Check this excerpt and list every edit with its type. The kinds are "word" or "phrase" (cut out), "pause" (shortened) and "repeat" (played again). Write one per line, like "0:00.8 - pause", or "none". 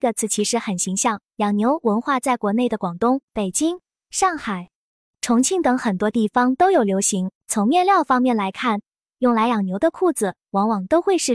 0:01.2 - pause
0:03.2 - pause
0:07.4 - pause